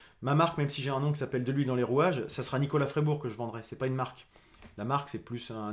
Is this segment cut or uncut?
uncut